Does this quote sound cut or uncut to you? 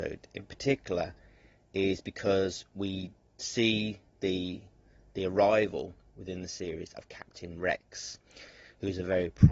uncut